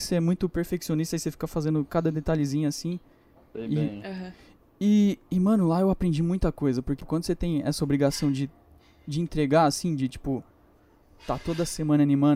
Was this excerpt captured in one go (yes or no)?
no